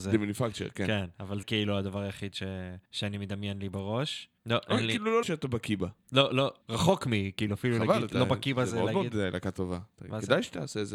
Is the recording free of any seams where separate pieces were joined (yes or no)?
no